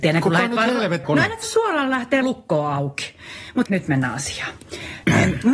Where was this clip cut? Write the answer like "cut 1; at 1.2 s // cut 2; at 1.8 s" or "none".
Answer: cut 1; at 1.0 s // cut 2; at 1.4 s // cut 3; at 2.2 s // cut 4; at 3.7 s